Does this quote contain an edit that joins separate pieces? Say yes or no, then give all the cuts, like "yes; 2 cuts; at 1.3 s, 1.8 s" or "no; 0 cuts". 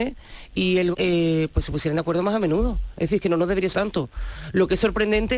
yes; 2 cuts; at 0.9 s, 3.7 s